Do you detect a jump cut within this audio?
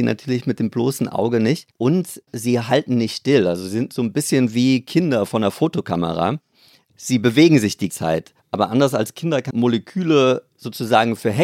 yes; 4 cuts; at 1.7 s, 7.9 s, 8.4 s, 9.5 s

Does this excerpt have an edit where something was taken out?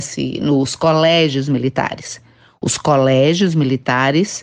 no; 0 cuts

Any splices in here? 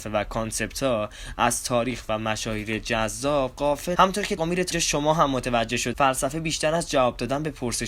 yes; 4 cuts; at 4.0 s, 4.4 s, 4.7 s, 5.9 s

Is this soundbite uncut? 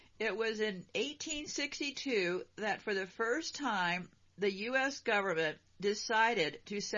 yes; 0 cuts

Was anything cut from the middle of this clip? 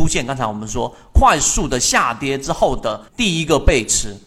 yes; 1 cut; at 3.1 s

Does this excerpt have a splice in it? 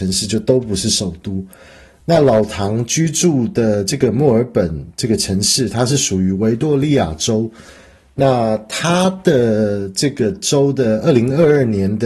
no; 0 cuts

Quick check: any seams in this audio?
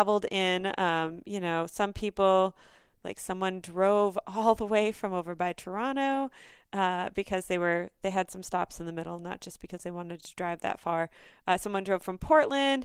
no; 0 cuts

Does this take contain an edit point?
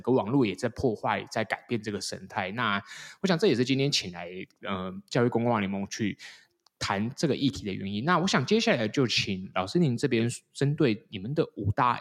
no; 0 cuts

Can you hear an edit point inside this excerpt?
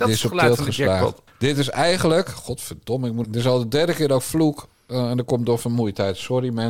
yes; 2 cuts; at 1.3 s, 3.2 s

